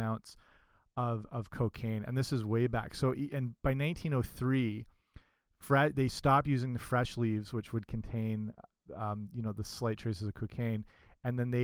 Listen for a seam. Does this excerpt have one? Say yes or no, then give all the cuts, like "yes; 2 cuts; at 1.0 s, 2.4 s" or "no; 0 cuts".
no; 0 cuts